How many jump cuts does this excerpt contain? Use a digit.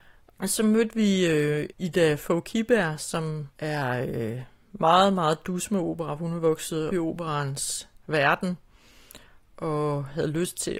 3